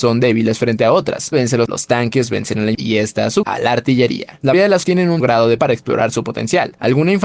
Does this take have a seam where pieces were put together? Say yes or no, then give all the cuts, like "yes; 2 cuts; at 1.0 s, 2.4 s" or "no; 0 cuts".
yes; 8 cuts; at 1.3 s, 1.7 s, 2.7 s, 3.4 s, 4.5 s, 4.8 s, 5.2 s, 5.6 s